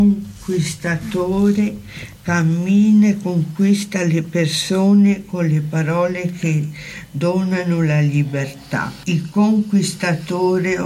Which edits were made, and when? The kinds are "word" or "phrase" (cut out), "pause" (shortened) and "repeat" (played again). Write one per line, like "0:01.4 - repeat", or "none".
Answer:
none